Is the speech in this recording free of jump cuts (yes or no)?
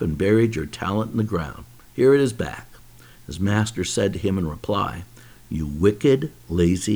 yes